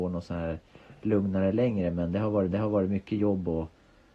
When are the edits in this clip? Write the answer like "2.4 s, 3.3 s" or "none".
2.5 s